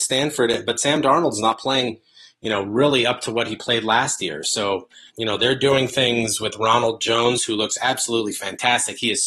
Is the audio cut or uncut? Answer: cut